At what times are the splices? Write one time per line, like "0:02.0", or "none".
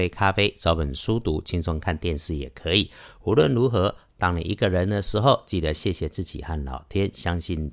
none